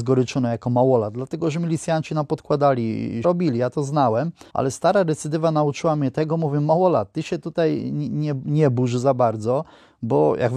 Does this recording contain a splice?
yes; 2 cuts; at 3.2 s, 4.5 s

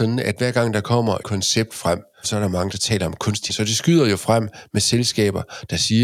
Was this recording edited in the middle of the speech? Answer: yes; 3 cuts; at 1.2 s, 2.2 s, 3.5 s

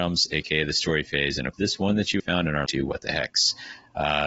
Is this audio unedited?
no; 3 cuts; at 1.5 s, 2.2 s, 2.7 s

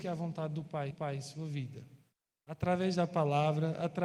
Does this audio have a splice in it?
yes; 2 cuts; at 0.9 s, 2.1 s

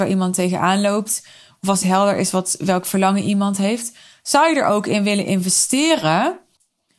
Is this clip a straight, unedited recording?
no; 1 cut; at 1.8 s

